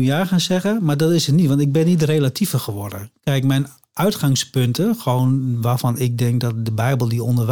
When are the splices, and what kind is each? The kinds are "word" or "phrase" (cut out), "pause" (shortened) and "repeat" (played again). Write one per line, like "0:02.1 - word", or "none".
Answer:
none